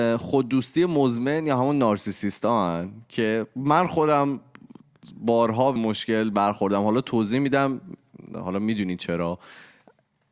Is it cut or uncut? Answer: cut